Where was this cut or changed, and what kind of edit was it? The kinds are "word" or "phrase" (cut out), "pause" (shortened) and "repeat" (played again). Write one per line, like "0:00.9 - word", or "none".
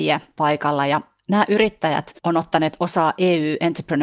0:02.2 - pause

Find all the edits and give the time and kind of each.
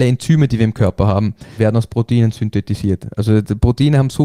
0:01.6 - word

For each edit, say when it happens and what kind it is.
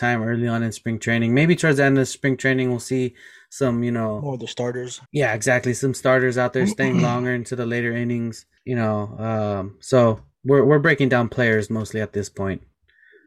0:05.1 - pause
0:08.6 - pause
0:10.4 - pause

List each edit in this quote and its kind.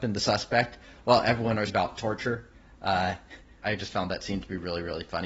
0:01.7 - word
0:03.6 - word

